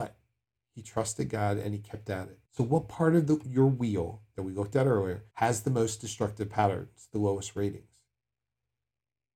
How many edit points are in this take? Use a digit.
2